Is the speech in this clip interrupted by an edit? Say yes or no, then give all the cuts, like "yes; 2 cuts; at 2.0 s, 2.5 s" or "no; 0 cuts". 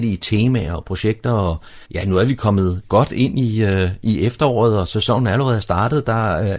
yes; 1 cut; at 1.8 s